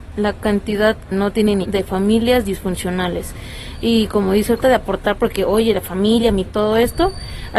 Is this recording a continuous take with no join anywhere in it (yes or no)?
no